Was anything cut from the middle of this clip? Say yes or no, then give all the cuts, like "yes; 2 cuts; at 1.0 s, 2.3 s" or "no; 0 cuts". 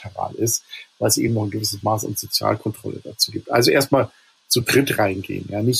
no; 0 cuts